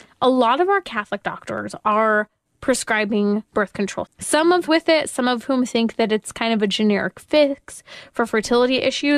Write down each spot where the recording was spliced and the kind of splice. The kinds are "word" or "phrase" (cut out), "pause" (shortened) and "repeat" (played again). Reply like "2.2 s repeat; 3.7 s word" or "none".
3.5 s pause; 4.1 s word; 4.7 s phrase

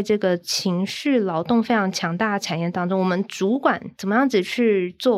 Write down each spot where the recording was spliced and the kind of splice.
3.9 s pause

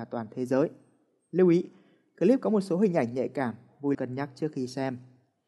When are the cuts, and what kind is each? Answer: 3.9 s word

